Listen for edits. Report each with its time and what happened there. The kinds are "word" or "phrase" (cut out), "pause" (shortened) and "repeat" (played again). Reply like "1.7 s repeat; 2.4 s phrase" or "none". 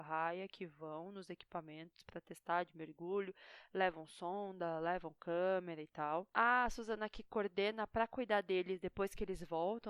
6.3 s pause